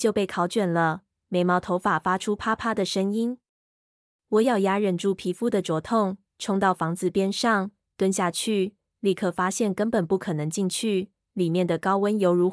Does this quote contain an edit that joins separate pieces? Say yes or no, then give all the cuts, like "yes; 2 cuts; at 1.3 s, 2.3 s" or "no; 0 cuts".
no; 0 cuts